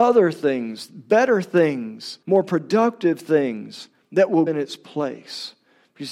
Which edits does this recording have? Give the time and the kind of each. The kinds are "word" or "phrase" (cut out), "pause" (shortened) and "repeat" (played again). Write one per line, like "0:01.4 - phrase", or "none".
0:02.2 - pause
0:04.0 - pause
0:04.5 - word